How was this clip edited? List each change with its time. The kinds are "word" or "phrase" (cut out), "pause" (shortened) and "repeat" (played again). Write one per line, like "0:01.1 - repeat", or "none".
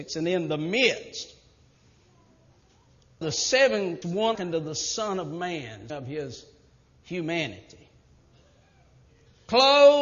0:03.2 - word
0:04.0 - word
0:04.3 - word
0:05.9 - word